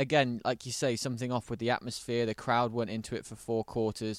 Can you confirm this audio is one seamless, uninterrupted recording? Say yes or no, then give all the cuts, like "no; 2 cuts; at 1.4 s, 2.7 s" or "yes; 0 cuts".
yes; 0 cuts